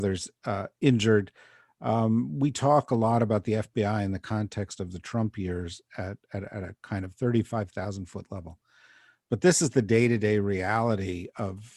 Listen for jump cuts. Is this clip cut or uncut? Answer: uncut